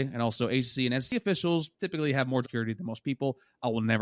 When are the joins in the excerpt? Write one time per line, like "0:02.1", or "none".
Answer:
0:01.7
0:02.4